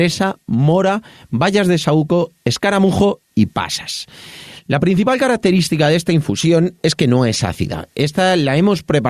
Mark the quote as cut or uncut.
uncut